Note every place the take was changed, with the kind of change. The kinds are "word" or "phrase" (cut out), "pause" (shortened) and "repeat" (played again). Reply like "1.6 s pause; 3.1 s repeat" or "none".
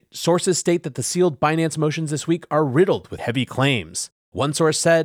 3.2 s word